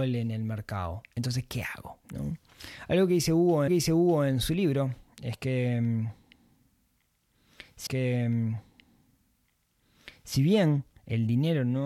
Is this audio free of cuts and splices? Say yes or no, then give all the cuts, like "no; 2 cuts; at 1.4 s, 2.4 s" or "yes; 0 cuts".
no; 4 cuts; at 1.1 s, 2.0 s, 3.7 s, 7.9 s